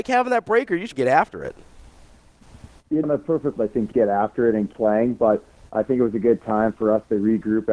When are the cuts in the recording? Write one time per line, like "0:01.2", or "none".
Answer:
0:00.9
0:03.0
0:03.6
0:03.9
0:04.7